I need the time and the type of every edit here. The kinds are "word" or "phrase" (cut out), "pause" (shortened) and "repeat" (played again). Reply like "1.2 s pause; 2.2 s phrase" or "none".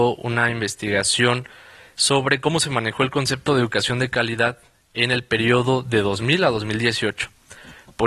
none